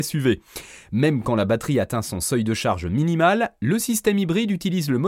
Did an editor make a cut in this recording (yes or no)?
no